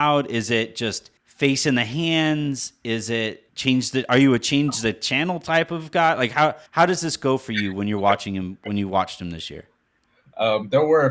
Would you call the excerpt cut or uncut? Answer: cut